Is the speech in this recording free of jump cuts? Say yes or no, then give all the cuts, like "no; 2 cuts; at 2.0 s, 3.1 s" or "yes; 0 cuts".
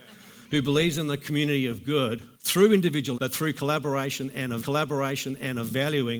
no; 3 cuts; at 2.3 s, 3.1 s, 4.6 s